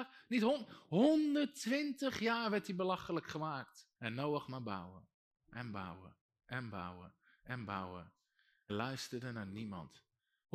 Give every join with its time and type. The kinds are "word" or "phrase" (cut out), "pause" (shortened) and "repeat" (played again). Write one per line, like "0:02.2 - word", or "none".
0:04.0 - pause
0:08.7 - word